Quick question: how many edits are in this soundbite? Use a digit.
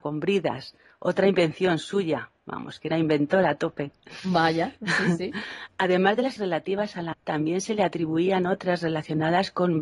3